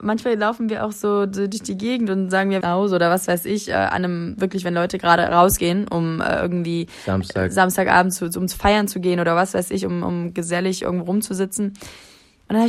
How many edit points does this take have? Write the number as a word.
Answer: one